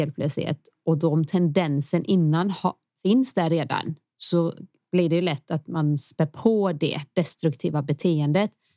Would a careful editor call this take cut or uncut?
uncut